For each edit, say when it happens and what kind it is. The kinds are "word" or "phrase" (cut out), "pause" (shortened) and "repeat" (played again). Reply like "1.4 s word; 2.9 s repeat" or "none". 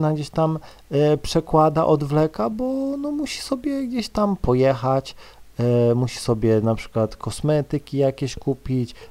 none